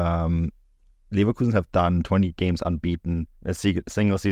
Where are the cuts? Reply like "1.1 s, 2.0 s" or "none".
3.4 s